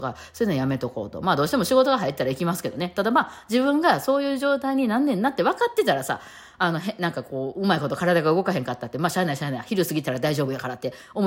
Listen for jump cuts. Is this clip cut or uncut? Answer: uncut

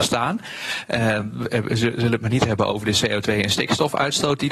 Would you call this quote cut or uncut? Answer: uncut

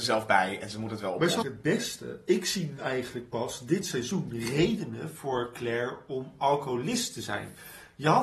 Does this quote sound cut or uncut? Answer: cut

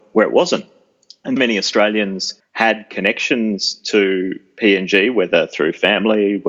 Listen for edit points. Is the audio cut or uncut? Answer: cut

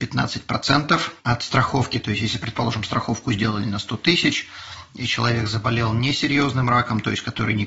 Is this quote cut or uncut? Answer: cut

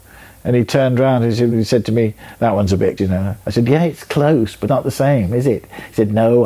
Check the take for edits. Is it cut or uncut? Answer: cut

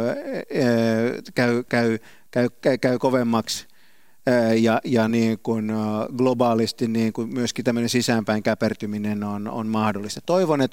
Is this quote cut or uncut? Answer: uncut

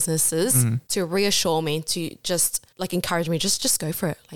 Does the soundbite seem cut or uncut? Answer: cut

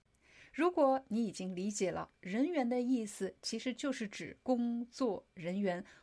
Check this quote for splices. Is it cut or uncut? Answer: cut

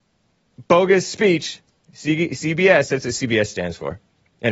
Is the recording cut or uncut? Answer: uncut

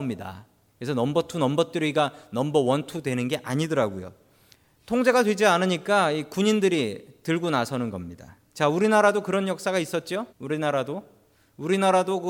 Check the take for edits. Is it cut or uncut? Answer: cut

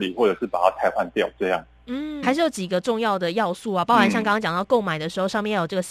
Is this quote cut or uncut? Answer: cut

